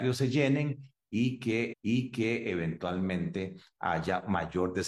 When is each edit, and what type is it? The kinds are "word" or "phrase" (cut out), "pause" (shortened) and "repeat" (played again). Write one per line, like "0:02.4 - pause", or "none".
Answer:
0:01.7 - repeat